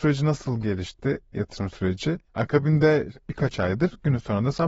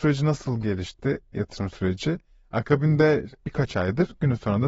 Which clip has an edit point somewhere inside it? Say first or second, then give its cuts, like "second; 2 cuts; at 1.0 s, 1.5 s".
first; 1 cut; at 2.3 s